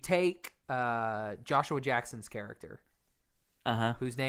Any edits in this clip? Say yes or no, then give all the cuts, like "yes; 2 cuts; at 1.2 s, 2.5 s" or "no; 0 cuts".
no; 0 cuts